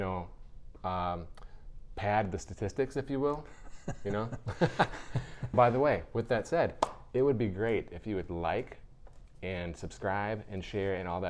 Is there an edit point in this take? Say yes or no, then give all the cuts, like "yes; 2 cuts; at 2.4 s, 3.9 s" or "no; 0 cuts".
yes; 1 cut; at 5.5 s